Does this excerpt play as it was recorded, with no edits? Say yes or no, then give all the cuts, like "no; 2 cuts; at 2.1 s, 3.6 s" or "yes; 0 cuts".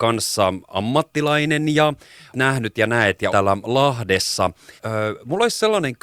no; 3 cuts; at 2.3 s, 3.3 s, 4.8 s